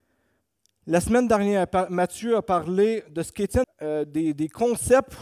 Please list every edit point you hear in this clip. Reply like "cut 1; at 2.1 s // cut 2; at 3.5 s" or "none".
cut 1; at 3.6 s